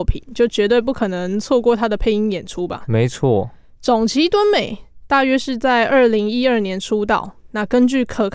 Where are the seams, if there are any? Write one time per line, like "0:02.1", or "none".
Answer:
none